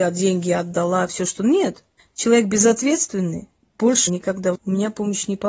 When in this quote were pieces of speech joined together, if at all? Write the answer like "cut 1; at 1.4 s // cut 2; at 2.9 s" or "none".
cut 1; at 1.1 s // cut 2; at 2.0 s // cut 3; at 4.1 s // cut 4; at 4.5 s